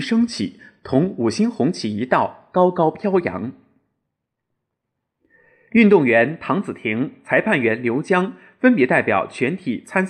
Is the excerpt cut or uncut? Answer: uncut